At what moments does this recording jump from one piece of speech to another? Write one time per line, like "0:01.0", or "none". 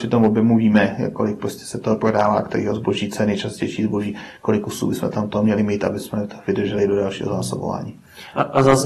none